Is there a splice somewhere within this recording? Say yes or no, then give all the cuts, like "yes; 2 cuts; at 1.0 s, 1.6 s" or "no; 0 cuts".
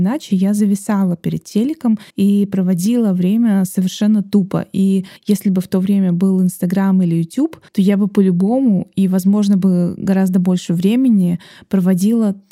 yes; 3 cuts; at 2.1 s, 5.2 s, 7.7 s